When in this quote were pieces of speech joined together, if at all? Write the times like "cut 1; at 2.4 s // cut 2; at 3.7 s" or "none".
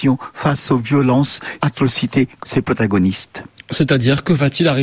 cut 1; at 1.6 s // cut 2; at 2.4 s